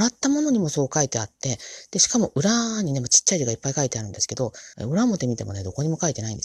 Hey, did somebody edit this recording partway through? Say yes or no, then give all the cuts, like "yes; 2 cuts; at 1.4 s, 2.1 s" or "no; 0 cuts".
yes; 1 cut; at 4.7 s